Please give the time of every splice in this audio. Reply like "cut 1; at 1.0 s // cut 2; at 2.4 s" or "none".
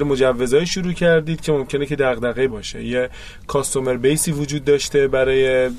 cut 1; at 2.5 s

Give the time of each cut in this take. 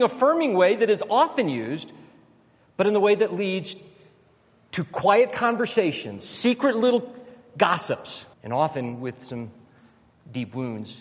cut 1; at 8.3 s

